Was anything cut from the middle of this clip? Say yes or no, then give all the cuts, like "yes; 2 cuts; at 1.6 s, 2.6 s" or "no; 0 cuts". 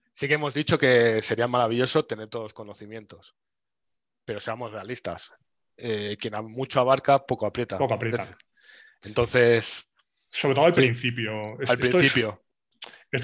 no; 0 cuts